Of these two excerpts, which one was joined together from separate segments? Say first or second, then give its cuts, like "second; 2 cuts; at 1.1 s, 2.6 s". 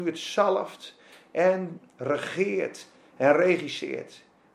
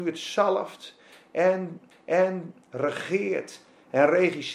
second; 1 cut; at 1.9 s